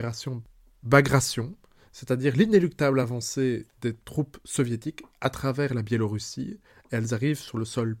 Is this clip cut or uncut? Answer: uncut